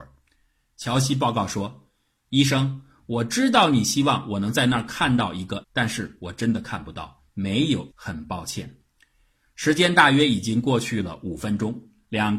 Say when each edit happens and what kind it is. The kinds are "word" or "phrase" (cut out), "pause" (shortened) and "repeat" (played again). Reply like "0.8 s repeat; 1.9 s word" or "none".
5.6 s word; 7.9 s word

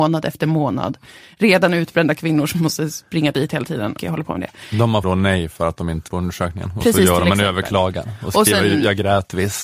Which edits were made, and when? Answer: 4.0 s word; 5.0 s word; 6.1 s word

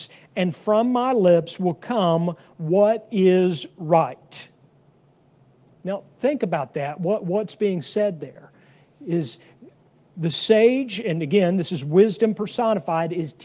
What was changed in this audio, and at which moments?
none

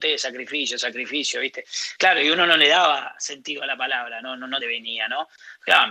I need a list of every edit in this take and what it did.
4.2 s word; 4.6 s phrase

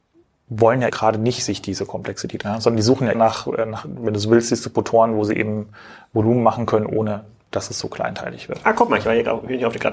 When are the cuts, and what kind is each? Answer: 0.9 s word; 2.4 s phrase; 3.1 s word

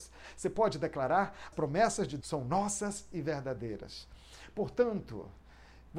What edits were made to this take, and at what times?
1.5 s word; 2.2 s word

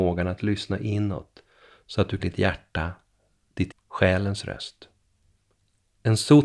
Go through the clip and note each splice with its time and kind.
2.2 s phrase; 3.7 s word

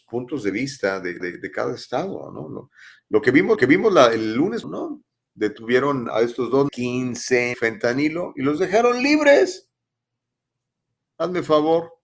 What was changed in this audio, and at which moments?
1.2 s repeat; 3.6 s repeat; 4.6 s word; 6.1 s word; 6.7 s phrase; 7.5 s phrase

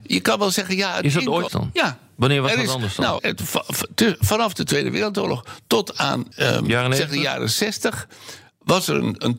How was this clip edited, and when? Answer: 1.5 s phrase; 3.2 s word; 6.3 s pause

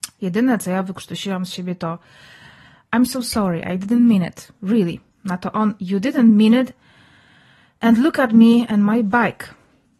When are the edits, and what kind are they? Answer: none

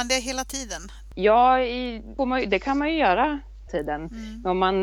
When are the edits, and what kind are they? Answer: 2.2 s word; 3.7 s word

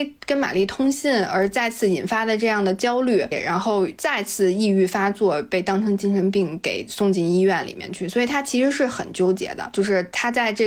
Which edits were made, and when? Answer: 3.3 s phrase

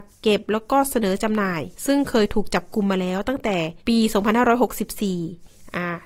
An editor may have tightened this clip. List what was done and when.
1.7 s pause; 3.8 s pause

